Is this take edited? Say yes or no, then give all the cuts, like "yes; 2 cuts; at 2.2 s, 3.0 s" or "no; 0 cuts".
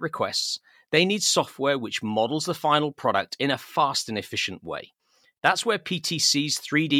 no; 0 cuts